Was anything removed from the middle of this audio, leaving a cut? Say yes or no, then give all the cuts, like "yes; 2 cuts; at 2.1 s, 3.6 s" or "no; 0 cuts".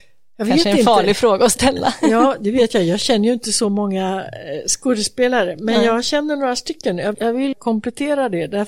yes; 2 cuts; at 7.1 s, 7.5 s